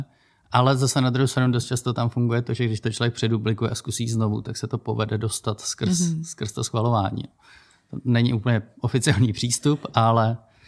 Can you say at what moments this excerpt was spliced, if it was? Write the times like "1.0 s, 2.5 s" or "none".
none

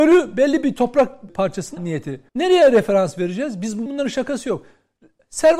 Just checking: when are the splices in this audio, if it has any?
1.3 s, 1.8 s, 2.3 s, 3.9 s

